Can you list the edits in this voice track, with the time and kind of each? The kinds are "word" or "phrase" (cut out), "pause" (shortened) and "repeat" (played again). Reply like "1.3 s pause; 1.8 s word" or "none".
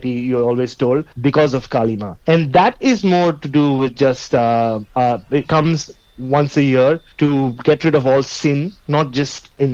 1.1 s pause; 2.2 s pause; 5.4 s phrase; 7.1 s pause